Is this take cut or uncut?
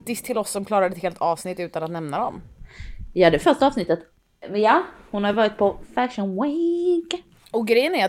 uncut